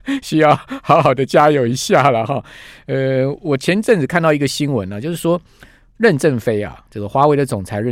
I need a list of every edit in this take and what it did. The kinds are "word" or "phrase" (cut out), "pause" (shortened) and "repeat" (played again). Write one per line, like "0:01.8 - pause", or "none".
none